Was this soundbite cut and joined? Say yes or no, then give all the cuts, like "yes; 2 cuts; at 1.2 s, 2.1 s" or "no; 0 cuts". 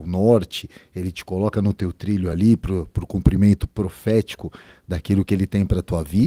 no; 0 cuts